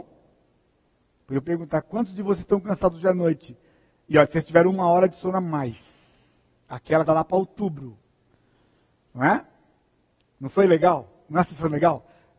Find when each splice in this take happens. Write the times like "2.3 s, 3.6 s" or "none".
1.4 s, 7.1 s